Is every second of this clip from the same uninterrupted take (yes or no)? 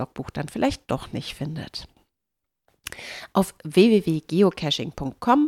yes